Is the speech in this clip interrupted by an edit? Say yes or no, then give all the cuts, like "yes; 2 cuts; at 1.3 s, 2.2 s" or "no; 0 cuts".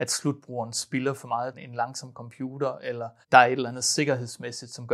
yes; 2 cuts; at 1.5 s, 3.2 s